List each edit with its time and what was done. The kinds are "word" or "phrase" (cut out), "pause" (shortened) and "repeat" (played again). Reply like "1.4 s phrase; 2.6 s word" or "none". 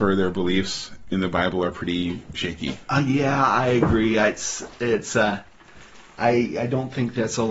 none